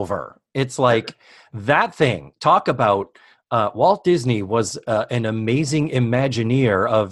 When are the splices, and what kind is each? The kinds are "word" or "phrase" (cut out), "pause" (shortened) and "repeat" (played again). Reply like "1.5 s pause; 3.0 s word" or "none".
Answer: none

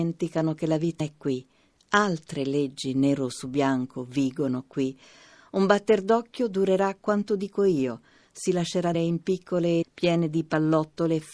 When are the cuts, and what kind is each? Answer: 1.0 s word; 8.9 s word; 9.8 s word

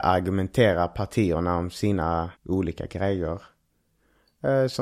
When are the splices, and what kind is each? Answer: 2.4 s pause

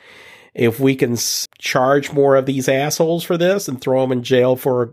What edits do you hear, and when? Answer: 1.5 s word

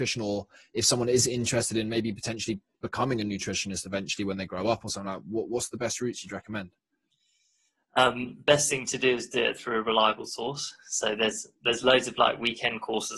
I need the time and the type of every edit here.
none

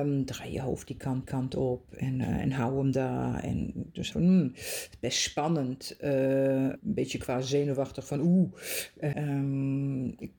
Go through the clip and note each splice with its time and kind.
1.2 s repeat; 4.1 s word; 6.8 s phrase; 9.1 s word

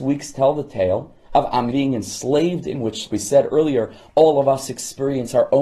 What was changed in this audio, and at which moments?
1.7 s word; 2.7 s word; 3.1 s word

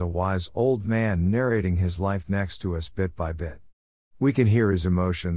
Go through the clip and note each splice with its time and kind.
none

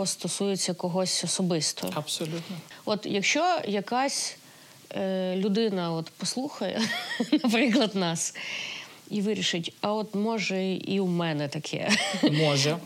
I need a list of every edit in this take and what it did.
none

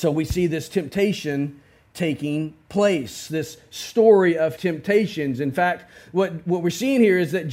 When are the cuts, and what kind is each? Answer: 4.6 s word

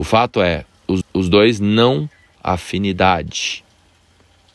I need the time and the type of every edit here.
1.0 s repeat; 2.3 s word

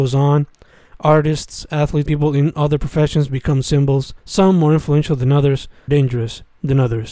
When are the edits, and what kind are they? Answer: 2.1 s word; 4.2 s pause; 5.9 s phrase

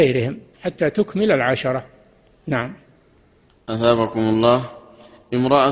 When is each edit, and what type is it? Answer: none

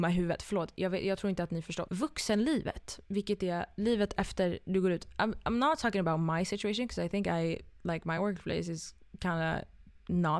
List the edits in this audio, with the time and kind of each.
none

